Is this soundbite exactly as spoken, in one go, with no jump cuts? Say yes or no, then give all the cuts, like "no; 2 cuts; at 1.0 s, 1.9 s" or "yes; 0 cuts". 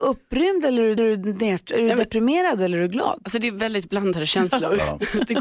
no; 1 cut; at 1.0 s